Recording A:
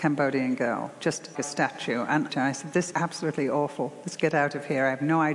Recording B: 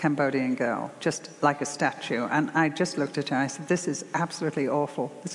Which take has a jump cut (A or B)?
A